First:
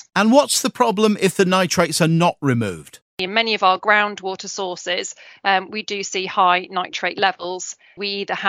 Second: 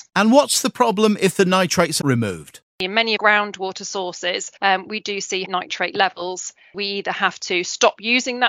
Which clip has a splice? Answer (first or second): second